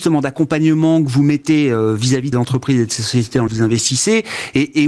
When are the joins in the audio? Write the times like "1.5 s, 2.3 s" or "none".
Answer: 2.3 s, 3.5 s

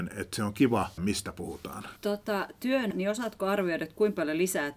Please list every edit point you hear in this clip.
1.0 s, 2.0 s, 2.9 s

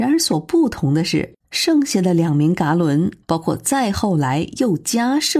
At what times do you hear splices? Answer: 1.4 s, 3.2 s

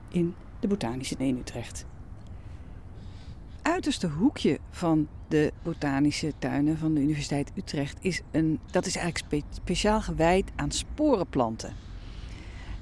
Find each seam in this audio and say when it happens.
1.2 s, 3.6 s, 8.7 s

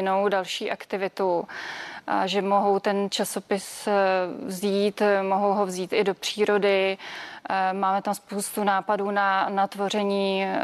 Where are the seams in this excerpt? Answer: none

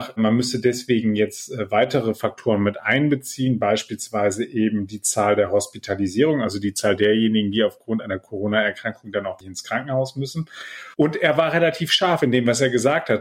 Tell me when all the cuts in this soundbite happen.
9.4 s, 10.9 s

